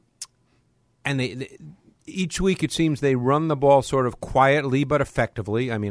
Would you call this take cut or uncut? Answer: uncut